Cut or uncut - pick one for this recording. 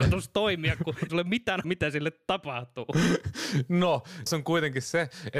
cut